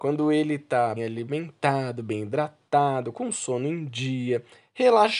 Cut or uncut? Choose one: cut